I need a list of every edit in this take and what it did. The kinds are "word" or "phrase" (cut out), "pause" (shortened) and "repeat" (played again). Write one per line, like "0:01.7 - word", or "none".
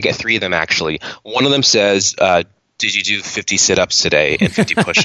none